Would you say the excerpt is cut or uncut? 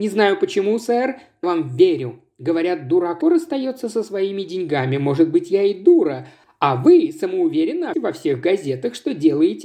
cut